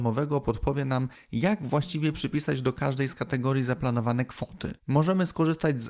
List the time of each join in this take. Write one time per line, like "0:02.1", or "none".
0:04.8